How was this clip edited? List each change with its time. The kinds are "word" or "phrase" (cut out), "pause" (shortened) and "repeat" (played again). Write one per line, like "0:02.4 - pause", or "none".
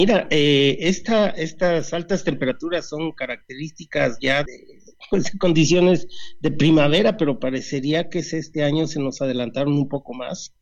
0:04.5 - word